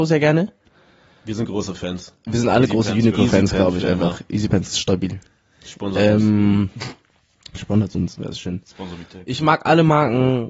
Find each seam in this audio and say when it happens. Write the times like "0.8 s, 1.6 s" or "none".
none